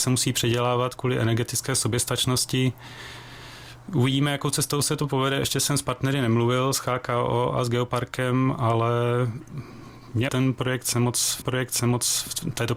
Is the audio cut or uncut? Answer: cut